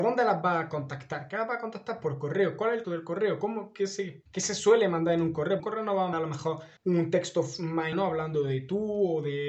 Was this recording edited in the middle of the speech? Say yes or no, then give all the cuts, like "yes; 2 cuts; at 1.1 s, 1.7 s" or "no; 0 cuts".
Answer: yes; 6 cuts; at 2.8 s, 4.3 s, 5.6 s, 6.1 s, 6.8 s, 7.9 s